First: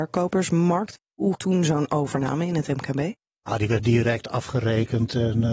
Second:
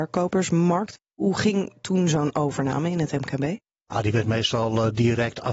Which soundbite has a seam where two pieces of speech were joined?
first; 2 cuts; at 1.3 s, 3.8 s

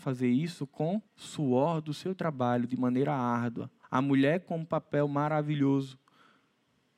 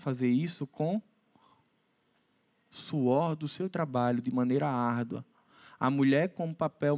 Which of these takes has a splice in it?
first; 2 cuts; at 1.1 s, 3.8 s

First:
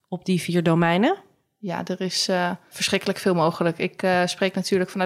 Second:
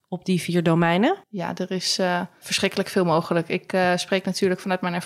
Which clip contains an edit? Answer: second; 1 cut; at 1.2 s

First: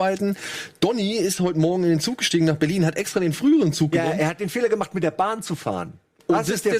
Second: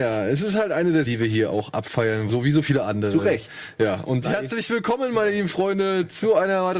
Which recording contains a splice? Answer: second; 3 cuts; at 1.1 s, 2.3 s, 4.2 s

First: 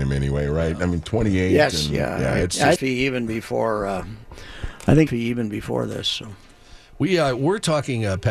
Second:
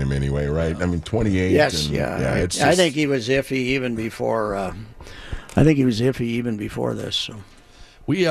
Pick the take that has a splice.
first; 2 cuts; at 2.8 s, 5.1 s

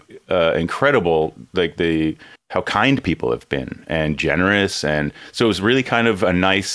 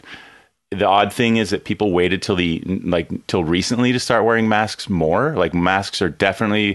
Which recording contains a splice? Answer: first; 1 cut; at 2.4 s

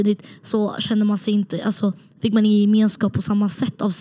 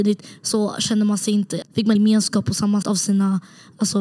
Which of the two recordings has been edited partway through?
second; 3 cuts; at 1.6 s, 2.0 s, 2.8 s

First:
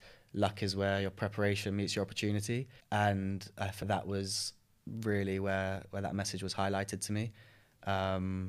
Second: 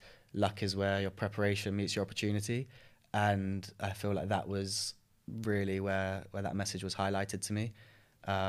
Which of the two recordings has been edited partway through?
first; 2 cuts; at 2.8 s, 3.8 s

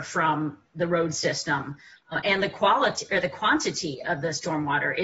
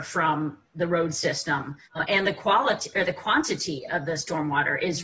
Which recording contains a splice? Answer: second; 1 cut; at 1.8 s

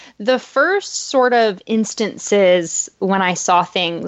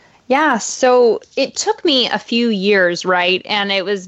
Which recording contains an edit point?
second; 1 cut; at 1.3 s

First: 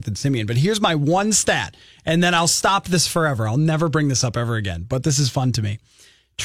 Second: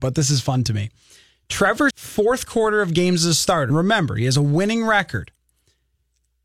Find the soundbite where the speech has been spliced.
second; 2 cuts; at 1.9 s, 3.7 s

